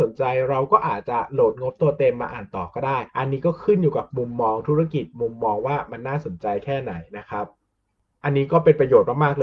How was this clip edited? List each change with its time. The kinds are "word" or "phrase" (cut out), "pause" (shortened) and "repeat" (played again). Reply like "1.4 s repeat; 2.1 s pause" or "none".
none